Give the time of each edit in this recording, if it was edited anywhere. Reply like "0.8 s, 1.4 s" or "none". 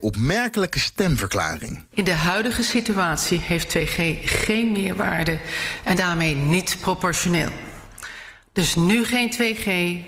5.9 s